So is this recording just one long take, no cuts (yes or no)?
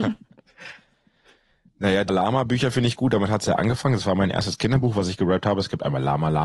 no